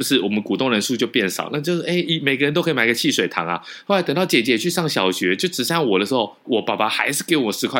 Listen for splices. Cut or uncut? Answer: cut